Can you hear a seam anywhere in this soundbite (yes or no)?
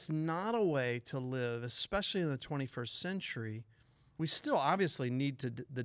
no